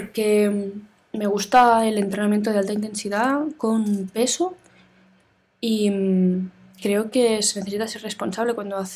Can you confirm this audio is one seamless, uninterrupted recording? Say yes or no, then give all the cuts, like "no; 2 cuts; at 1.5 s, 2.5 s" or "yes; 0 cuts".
yes; 0 cuts